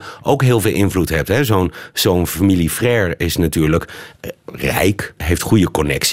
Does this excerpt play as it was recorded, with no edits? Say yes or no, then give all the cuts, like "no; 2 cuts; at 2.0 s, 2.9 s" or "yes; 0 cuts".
no; 1 cut; at 5.2 s